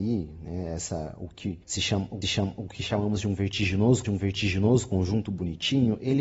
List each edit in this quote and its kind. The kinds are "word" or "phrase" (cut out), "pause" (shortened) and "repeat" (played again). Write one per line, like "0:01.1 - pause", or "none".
0:01.6 - pause
0:02.2 - repeat
0:04.0 - repeat

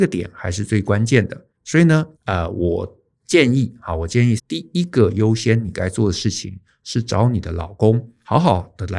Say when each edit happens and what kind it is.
0:01.5 - pause
0:02.1 - pause
0:04.4 - word

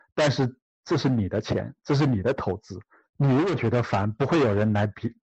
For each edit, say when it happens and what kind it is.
0:02.9 - pause

